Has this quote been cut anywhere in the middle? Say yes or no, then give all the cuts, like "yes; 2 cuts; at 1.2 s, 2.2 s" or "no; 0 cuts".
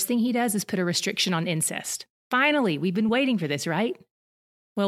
no; 0 cuts